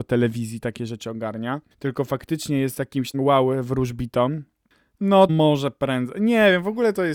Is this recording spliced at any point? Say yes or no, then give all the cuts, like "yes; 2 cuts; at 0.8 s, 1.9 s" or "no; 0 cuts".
yes; 3 cuts; at 1.7 s, 3.1 s, 5.3 s